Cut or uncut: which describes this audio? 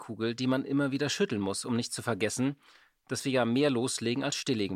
uncut